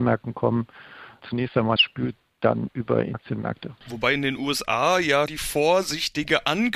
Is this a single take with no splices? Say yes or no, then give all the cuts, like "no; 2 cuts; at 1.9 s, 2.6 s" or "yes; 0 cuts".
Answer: no; 4 cuts; at 1.8 s, 3.1 s, 3.8 s, 5.3 s